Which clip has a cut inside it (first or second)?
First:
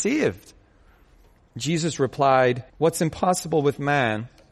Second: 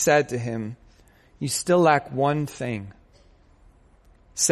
first